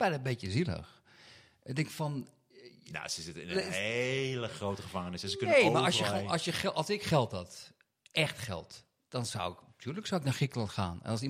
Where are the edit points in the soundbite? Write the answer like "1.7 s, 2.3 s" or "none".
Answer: none